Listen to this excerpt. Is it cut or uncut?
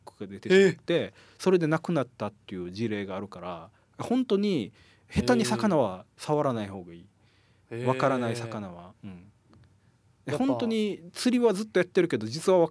cut